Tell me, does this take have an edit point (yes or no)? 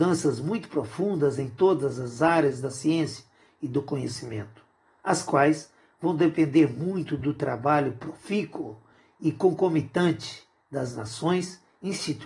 no